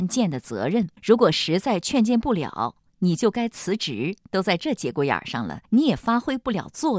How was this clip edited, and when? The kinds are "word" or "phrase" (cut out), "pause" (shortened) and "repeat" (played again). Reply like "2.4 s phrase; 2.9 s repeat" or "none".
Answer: 1.0 s pause; 4.2 s pause; 5.6 s pause